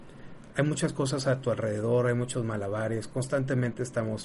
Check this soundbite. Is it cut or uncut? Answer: uncut